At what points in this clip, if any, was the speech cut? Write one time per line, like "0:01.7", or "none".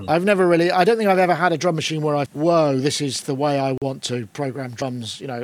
0:02.3